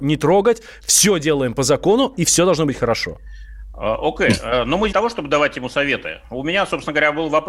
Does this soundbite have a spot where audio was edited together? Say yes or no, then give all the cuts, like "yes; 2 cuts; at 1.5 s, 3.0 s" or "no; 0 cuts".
yes; 1 cut; at 4.9 s